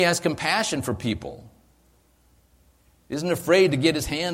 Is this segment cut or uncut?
uncut